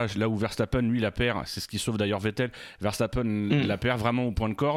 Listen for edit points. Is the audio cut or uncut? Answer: uncut